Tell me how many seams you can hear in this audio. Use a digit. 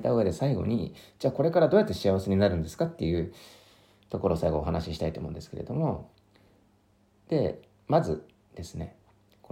1